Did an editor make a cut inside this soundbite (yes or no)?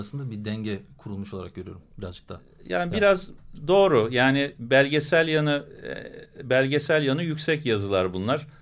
no